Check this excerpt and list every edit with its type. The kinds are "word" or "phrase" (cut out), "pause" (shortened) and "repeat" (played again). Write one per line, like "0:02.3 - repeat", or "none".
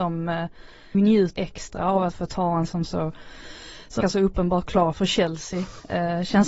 0:00.9 - word
0:01.4 - word
0:02.1 - word
0:02.7 - word
0:04.0 - word
0:04.9 - word